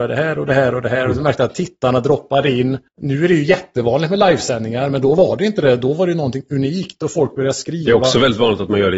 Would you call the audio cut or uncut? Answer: cut